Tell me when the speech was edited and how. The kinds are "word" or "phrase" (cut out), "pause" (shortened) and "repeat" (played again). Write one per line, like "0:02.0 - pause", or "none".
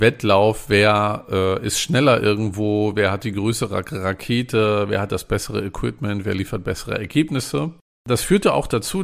none